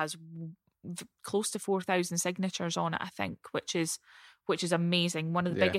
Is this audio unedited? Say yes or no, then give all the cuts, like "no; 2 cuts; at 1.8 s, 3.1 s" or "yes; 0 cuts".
yes; 0 cuts